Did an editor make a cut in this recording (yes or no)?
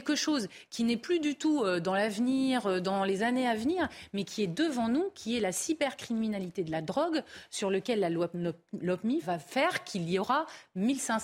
yes